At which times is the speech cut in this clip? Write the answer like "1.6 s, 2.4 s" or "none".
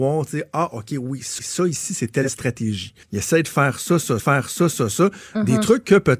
1.4 s, 3.0 s, 4.2 s